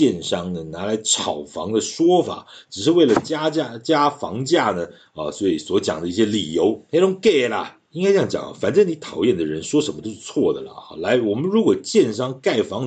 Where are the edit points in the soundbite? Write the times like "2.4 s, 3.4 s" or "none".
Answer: 7.9 s